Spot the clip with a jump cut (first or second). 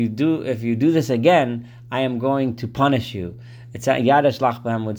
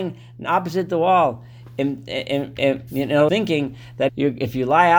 second